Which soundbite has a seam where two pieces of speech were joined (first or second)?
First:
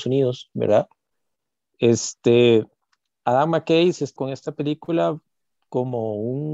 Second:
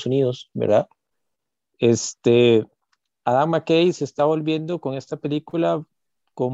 first